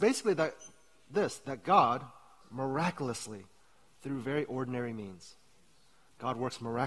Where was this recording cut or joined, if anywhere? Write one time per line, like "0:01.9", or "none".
0:02.4